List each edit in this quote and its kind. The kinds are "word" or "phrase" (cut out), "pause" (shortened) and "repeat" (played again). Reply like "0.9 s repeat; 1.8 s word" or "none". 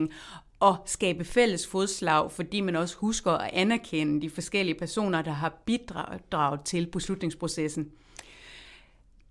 none